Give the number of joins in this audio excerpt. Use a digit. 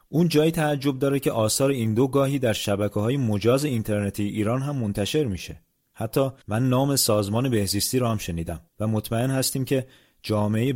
2